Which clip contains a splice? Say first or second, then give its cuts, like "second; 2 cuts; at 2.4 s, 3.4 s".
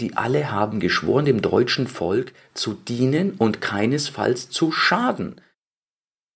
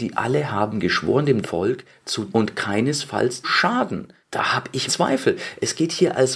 second; 5 cuts; at 1.4 s, 2.3 s, 3.4 s, 4.2 s, 4.9 s